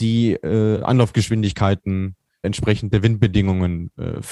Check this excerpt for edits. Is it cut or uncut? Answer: cut